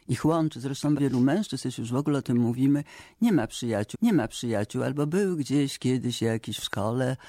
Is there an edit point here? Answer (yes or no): yes